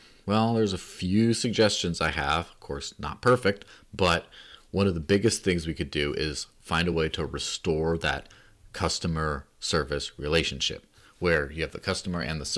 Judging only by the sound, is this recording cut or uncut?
uncut